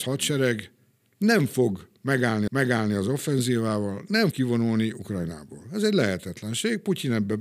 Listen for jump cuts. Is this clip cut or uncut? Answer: cut